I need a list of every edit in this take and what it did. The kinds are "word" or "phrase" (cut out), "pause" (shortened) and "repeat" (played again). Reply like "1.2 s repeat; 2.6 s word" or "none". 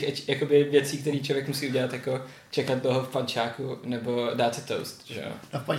none